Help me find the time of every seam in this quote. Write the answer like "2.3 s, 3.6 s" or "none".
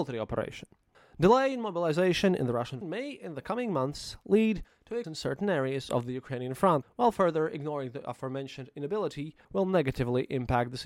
0.9 s, 2.8 s, 5.0 s, 6.8 s, 9.4 s